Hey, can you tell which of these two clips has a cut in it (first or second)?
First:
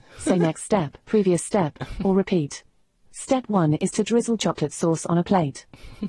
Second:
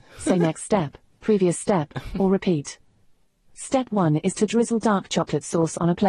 first